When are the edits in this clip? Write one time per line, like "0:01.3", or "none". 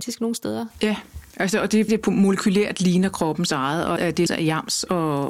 0:01.9
0:04.0
0:04.3